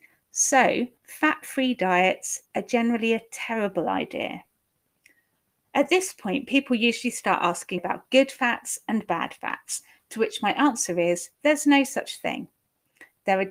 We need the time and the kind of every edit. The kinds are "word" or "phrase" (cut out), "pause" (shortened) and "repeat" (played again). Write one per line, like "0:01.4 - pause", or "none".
0:01.0 - pause
0:02.5 - pause
0:07.8 - word
0:11.3 - pause

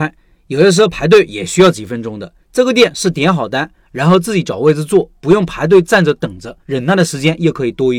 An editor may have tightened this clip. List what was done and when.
0:02.4 - pause
0:06.6 - pause

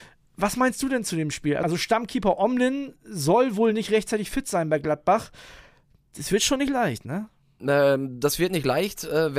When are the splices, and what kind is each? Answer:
none

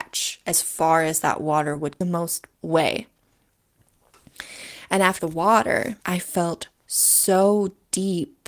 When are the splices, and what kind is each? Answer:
0:02.0 - phrase
0:02.5 - word
0:05.2 - phrase
0:06.0 - pause
0:06.8 - pause

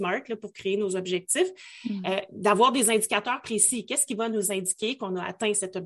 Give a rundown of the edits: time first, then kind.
none

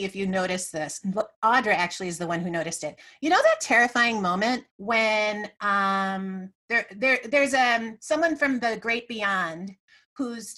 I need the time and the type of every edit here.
0:04.7 - pause
0:06.6 - pause

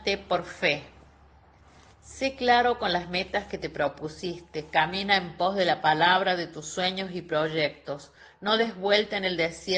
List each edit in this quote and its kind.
none

